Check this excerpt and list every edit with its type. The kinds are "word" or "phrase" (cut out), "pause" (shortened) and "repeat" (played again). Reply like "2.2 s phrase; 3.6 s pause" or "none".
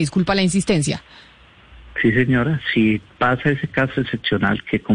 none